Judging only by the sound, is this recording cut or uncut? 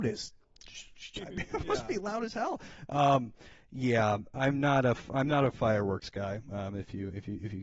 uncut